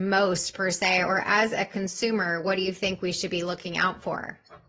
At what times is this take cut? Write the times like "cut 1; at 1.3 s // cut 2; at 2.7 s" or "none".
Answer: none